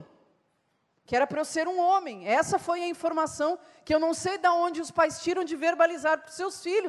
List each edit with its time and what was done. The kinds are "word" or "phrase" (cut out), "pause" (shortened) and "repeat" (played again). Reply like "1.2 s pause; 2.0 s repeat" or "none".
none